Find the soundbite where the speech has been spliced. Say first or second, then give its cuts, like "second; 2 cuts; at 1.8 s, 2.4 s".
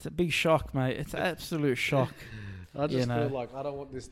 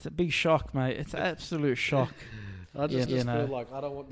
second; 1 cut; at 3.1 s